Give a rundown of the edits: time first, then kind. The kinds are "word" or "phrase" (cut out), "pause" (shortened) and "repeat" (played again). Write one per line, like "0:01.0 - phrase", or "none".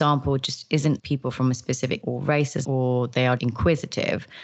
0:01.0 - word
0:02.0 - word
0:02.6 - word
0:03.4 - word